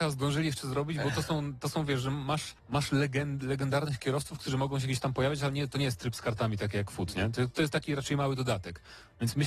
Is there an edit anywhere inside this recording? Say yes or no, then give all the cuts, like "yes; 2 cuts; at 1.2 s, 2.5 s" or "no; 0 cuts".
yes; 1 cut; at 2.6 s